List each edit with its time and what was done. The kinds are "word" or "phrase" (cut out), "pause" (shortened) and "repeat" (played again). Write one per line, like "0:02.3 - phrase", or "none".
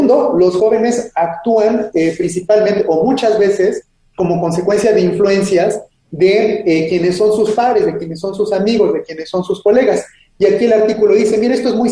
none